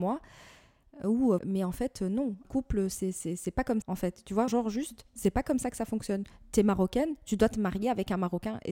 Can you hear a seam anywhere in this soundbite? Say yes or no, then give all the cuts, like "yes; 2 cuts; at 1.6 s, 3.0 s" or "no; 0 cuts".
yes; 4 cuts; at 1.4 s, 2.4 s, 3.8 s, 4.5 s